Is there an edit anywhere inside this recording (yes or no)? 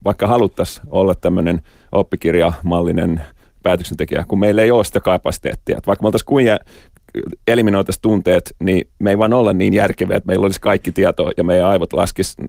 no